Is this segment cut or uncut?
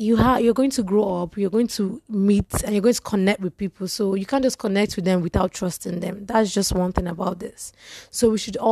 uncut